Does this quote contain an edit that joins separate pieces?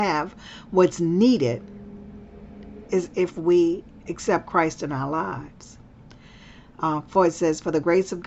no; 0 cuts

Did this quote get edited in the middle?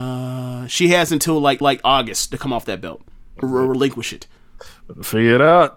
yes; 2 cuts; at 1.6 s, 3.4 s

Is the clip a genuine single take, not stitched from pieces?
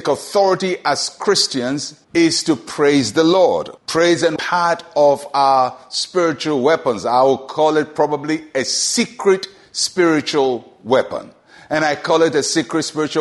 no; 3 cuts; at 2.0 s, 3.8 s, 4.4 s

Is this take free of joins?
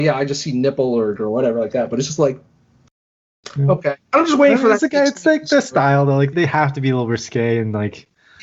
no; 2 cuts; at 1.2 s, 6.3 s

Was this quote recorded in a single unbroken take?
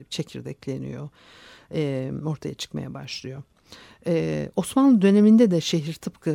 yes; 0 cuts

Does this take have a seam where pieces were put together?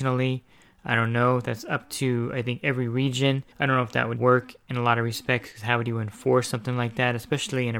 yes; 2 cuts; at 3.5 s, 4.2 s

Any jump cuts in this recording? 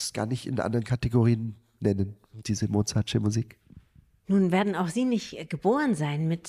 no; 0 cuts

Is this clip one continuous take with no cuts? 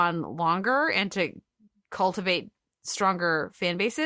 yes; 0 cuts

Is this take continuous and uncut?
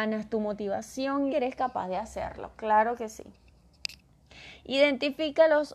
no; 1 cut; at 1.3 s

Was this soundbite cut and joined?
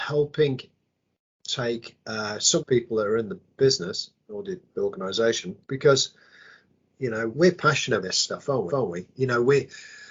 yes; 5 cuts; at 2.6 s, 5.6 s, 7.3 s, 8.0 s, 8.7 s

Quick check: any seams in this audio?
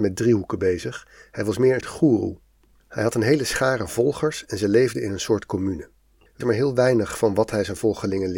yes; 2 cuts; at 1.8 s, 6.4 s

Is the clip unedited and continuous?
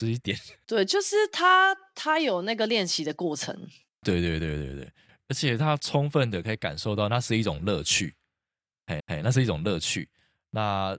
no; 1 cut; at 9.0 s

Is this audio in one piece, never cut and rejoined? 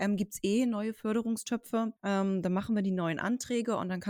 no; 1 cut; at 2.0 s

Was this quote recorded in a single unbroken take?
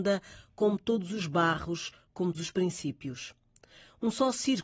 no; 1 cut; at 2.3 s

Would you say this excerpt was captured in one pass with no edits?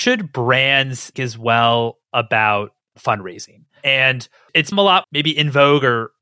no; 3 cuts; at 1.1 s, 4.7 s, 5.0 s

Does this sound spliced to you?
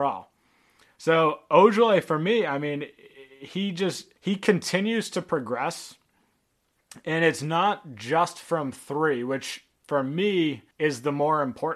yes; 3 cuts; at 4.2 s, 9.8 s, 10.7 s

